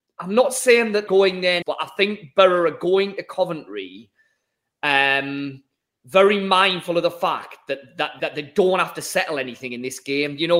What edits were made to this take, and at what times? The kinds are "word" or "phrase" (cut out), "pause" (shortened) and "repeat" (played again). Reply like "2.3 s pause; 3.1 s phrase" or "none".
1.1 s word; 1.6 s phrase; 8.2 s word